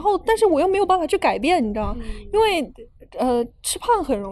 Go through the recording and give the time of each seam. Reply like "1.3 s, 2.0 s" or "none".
3.1 s